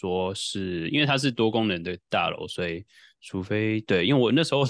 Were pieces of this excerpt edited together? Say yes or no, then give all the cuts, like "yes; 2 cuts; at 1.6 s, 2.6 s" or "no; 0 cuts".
no; 0 cuts